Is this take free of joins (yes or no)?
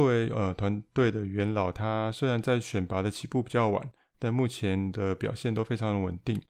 yes